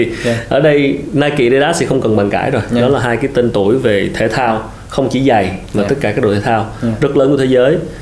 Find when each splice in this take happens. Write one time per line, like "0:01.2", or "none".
none